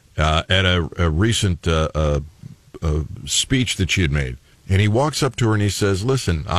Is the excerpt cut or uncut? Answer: cut